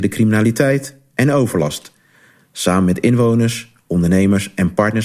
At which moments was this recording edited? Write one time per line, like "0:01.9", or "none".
none